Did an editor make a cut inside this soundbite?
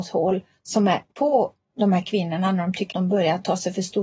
yes; 2 cuts; at 1.1 s, 2.9 s

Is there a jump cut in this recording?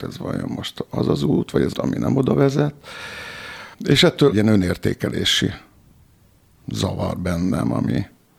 yes; 3 cuts; at 1.7 s, 3.7 s, 4.3 s

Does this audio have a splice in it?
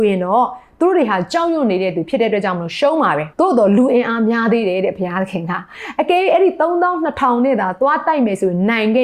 yes; 1 cut; at 3.3 s

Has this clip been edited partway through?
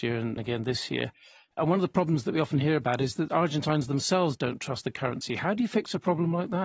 no; 0 cuts

